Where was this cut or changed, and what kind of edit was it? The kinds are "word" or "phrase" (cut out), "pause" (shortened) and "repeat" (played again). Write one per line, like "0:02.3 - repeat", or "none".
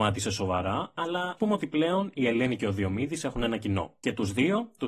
0:01.4 - word